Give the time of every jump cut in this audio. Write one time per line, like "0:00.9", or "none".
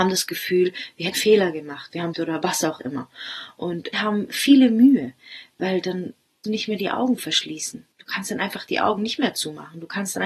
0:01.1
0:02.1
0:03.9
0:06.4
0:07.9